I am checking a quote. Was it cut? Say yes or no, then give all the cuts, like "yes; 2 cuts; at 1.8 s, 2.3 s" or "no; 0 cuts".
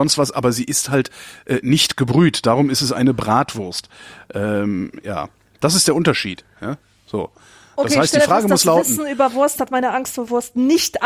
no; 0 cuts